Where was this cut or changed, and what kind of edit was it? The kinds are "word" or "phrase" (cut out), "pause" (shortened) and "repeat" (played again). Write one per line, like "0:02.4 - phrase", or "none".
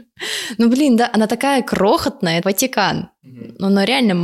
0:02.4 - phrase